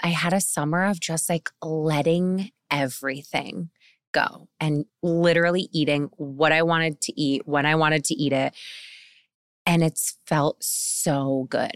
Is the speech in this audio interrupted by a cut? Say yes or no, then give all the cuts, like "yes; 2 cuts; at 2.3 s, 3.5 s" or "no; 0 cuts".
no; 0 cuts